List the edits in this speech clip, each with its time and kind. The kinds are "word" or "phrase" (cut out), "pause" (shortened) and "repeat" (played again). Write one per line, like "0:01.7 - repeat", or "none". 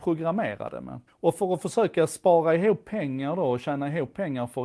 0:01.1 - pause